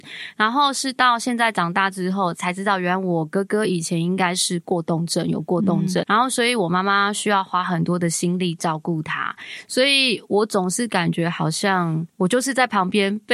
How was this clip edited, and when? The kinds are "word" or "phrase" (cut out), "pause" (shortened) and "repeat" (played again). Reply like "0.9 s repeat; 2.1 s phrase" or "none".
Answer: 6.0 s word; 12.1 s pause